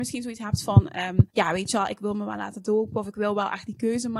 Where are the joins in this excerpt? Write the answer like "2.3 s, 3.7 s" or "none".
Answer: 1.3 s